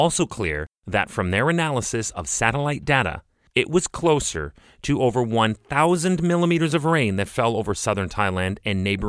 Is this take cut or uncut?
uncut